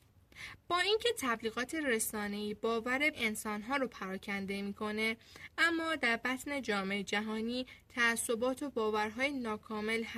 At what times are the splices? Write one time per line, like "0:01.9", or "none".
0:03.1